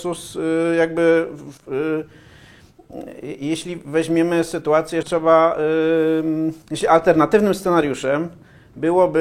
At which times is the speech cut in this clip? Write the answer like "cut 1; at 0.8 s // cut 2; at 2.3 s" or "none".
cut 1; at 1.6 s // cut 2; at 5.0 s // cut 3; at 6.6 s

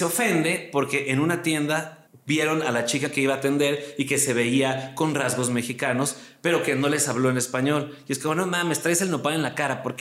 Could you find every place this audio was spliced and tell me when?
cut 1; at 2.1 s

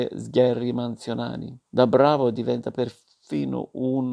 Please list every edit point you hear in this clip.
cut 1; at 1.7 s

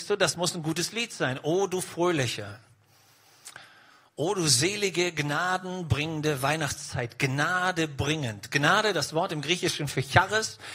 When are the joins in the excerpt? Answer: none

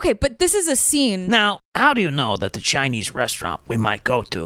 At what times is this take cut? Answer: cut 1; at 1.6 s

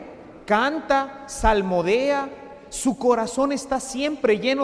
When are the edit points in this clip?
none

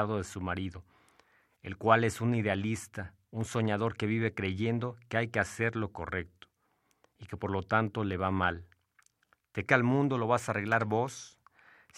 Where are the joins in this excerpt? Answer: cut 1; at 9.7 s

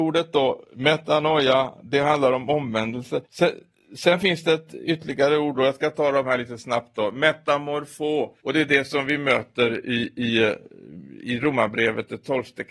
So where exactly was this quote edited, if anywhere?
cut 1; at 3.2 s // cut 2; at 8.4 s

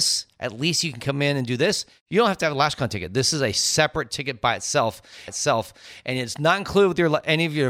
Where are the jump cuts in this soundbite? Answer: cut 1; at 5.3 s

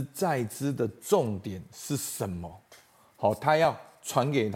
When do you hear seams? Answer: none

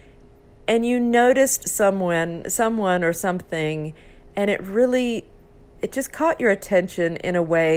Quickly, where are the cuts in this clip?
none

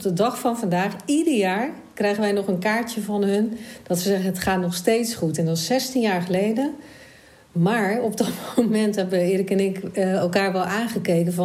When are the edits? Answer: none

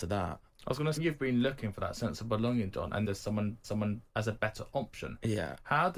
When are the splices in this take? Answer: cut 1; at 1.0 s // cut 2; at 2.7 s // cut 3; at 3.0 s // cut 4; at 3.6 s

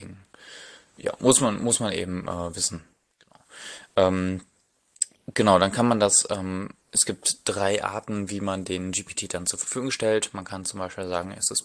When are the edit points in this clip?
cut 1; at 6.8 s

